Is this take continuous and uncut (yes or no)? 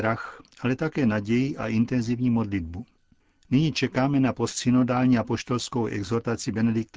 yes